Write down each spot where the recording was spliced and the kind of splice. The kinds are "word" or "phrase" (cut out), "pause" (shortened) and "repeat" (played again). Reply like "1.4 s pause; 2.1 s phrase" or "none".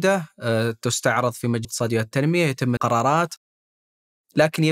1.6 s word; 2.8 s word